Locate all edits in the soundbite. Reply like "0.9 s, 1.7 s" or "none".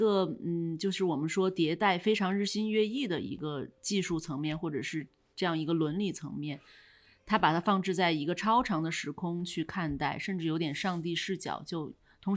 none